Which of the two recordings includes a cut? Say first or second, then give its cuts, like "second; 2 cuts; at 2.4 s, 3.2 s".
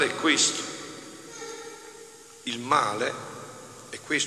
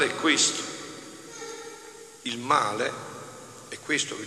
second; 1 cut; at 2.2 s